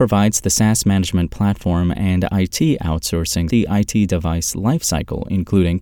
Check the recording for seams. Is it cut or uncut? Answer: cut